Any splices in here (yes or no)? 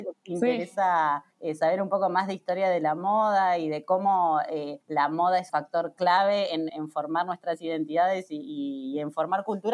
yes